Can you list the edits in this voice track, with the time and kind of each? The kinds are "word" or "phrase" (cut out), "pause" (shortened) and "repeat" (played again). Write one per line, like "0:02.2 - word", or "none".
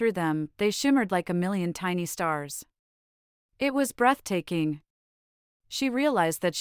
none